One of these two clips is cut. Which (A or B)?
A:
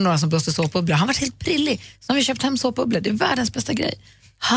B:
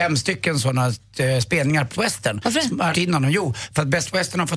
B